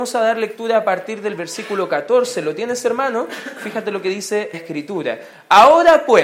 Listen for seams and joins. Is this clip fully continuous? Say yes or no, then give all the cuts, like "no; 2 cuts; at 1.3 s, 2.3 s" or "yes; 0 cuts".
no; 1 cut; at 4.5 s